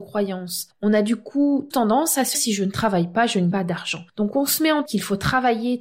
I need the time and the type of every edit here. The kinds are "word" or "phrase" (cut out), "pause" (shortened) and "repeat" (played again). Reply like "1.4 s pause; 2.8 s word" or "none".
1.7 s word; 2.3 s word; 3.5 s word; 4.9 s word